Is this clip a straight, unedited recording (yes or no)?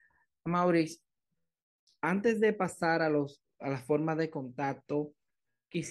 yes